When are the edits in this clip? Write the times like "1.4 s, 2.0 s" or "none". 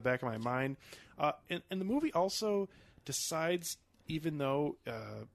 none

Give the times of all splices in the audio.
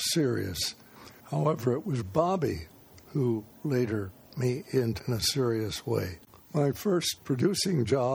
1.2 s, 2.0 s, 4.3 s, 5.0 s, 6.4 s, 7.2 s

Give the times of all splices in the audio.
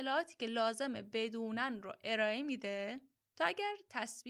none

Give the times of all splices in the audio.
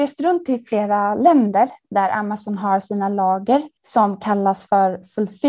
3.8 s

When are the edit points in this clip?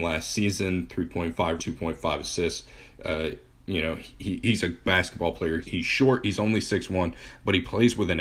1.6 s, 4.8 s, 5.6 s

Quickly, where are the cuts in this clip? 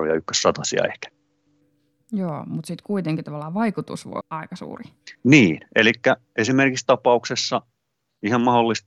4.2 s, 5.1 s, 6.9 s

